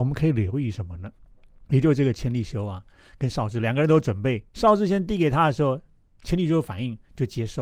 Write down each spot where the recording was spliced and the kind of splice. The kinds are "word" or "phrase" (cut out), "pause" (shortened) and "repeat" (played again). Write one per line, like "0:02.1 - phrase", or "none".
0:04.5 - pause